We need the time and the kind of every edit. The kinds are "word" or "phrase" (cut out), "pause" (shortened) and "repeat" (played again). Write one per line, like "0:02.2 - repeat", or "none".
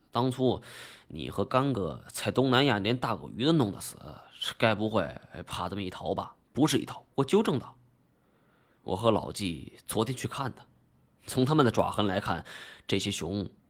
0:06.4 - pause
0:07.1 - pause